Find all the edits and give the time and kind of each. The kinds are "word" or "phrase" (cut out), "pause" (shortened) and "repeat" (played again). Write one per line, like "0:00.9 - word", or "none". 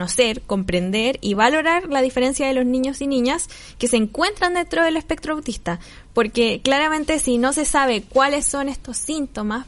none